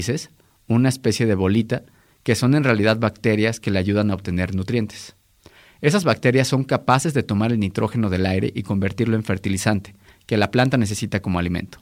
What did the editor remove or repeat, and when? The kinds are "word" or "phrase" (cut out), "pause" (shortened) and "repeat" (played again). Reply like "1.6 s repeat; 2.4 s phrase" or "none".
none

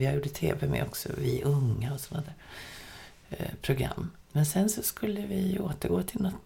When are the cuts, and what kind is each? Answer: 4.2 s pause

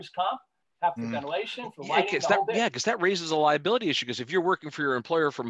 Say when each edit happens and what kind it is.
1.0 s phrase

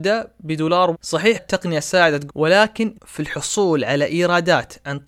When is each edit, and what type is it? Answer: 0.9 s word; 1.4 s word; 2.3 s word; 2.9 s word

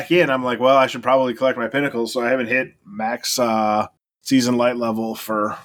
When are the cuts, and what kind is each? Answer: 4.0 s pause

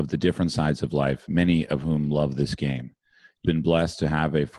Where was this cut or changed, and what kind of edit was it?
3.4 s word

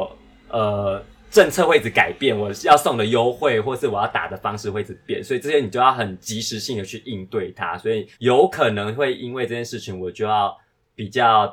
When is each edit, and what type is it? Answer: 8.1 s pause

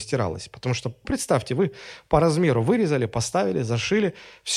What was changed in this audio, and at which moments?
1.0 s word

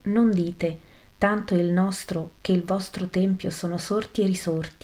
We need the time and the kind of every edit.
none

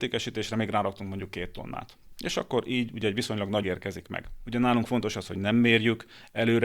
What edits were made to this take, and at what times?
3.6 s word

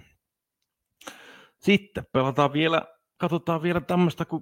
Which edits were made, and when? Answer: none

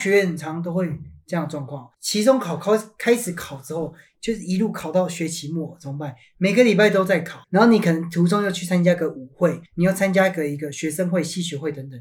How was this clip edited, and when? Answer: 1.9 s pause; 7.4 s pause; 9.7 s pause

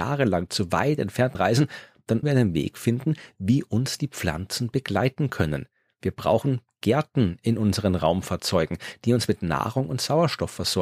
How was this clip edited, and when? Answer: 1.3 s word; 2.2 s word

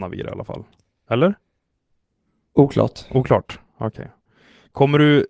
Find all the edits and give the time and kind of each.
none

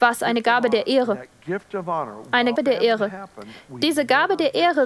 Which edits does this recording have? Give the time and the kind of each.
2.6 s word

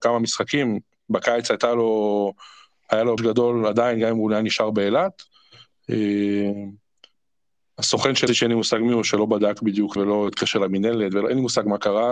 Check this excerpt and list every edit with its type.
3.2 s word; 8.3 s word; 10.0 s word

